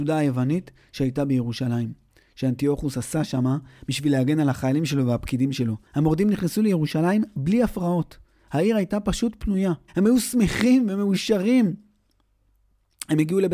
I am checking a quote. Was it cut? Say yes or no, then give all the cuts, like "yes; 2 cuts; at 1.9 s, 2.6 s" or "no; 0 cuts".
yes; 2 cuts; at 5.9 s, 9.9 s